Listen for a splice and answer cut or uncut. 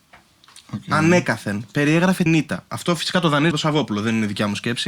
cut